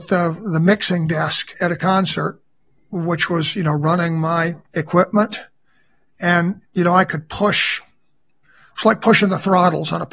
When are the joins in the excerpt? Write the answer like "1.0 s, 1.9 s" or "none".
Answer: 4.7 s